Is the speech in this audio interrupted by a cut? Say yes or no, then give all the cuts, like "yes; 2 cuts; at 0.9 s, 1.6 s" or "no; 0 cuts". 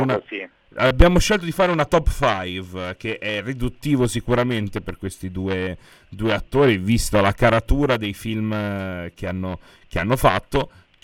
no; 0 cuts